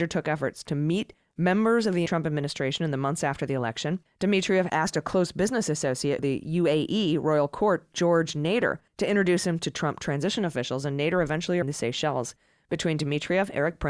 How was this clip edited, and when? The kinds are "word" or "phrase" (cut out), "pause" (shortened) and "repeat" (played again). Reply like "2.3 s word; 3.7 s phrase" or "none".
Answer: 2.1 s word; 4.1 s pause; 6.2 s phrase; 8.9 s pause; 11.6 s phrase

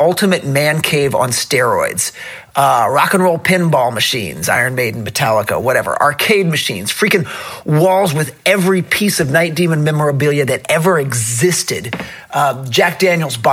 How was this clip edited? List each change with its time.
none

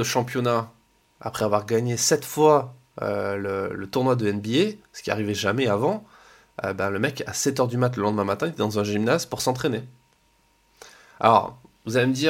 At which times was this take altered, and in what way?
none

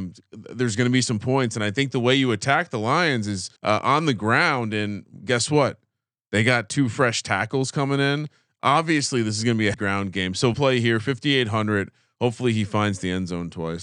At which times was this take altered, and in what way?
3.6 s pause; 9.7 s word; 10.5 s word

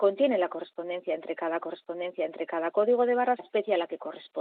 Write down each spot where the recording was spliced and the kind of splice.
1.6 s repeat; 3.4 s phrase

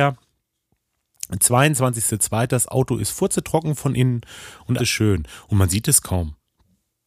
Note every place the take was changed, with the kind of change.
4.8 s word

